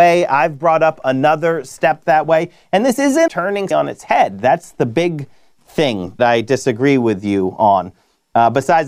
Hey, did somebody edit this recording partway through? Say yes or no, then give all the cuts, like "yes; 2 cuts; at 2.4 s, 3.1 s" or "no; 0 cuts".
yes; 3 cuts; at 3.3 s, 3.7 s, 6.2 s